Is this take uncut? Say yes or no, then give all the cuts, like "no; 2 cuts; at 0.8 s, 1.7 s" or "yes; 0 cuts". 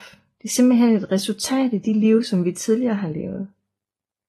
yes; 0 cuts